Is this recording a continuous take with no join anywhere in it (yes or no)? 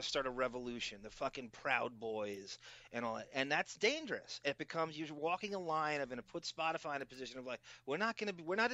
yes